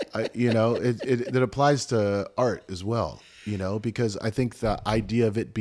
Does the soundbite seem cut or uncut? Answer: uncut